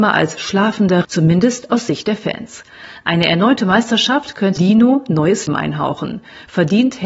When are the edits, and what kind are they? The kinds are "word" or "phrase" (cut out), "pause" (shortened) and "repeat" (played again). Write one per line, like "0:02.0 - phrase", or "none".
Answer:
0:01.0 - word
0:04.6 - word
0:05.5 - word